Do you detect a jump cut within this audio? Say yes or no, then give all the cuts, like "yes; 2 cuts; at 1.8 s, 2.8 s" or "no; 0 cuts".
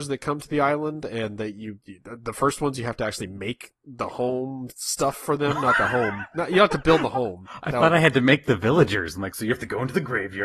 no; 0 cuts